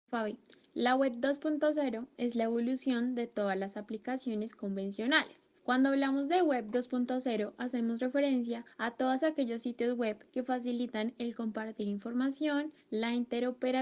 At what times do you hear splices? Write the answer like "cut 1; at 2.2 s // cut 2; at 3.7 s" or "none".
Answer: cut 1; at 5.6 s // cut 2; at 8.7 s // cut 3; at 10.3 s // cut 4; at 12.8 s